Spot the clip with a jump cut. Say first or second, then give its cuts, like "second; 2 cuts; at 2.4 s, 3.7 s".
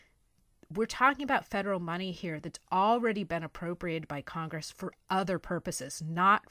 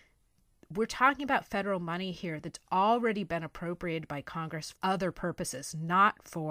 second; 1 cut; at 4.7 s